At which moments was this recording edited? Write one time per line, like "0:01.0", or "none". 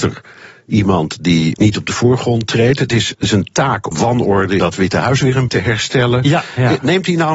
0:01.5
0:03.9
0:04.6
0:05.5